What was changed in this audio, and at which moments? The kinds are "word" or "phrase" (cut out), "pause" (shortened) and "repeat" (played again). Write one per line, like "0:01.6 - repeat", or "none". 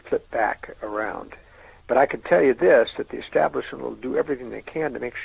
none